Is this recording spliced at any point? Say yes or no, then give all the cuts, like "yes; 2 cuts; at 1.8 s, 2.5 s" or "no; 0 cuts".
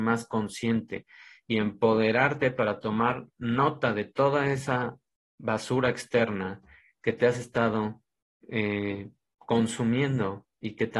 no; 0 cuts